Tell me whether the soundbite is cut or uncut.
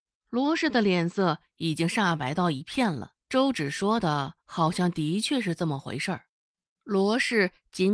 cut